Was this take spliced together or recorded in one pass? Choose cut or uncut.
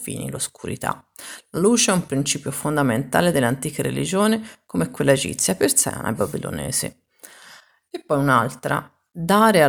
uncut